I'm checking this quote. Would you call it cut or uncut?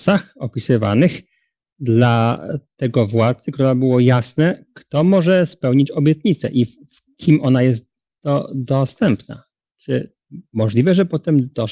uncut